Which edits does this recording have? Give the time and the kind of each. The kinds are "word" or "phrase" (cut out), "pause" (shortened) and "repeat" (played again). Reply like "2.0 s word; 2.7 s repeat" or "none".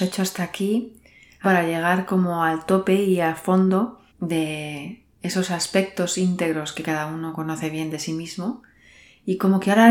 1.4 s word; 4.1 s pause